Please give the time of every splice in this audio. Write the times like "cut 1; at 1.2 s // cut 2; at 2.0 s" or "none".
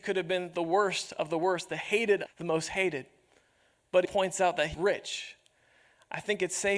cut 1; at 2.3 s // cut 2; at 4.0 s // cut 3; at 4.7 s